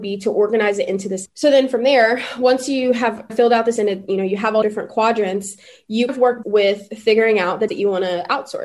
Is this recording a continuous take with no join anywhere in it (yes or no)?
no